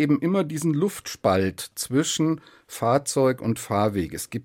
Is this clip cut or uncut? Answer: uncut